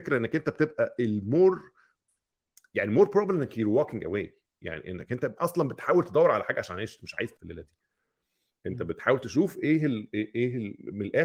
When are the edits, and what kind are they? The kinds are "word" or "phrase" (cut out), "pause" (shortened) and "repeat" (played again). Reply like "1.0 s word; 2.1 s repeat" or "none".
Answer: 7.3 s word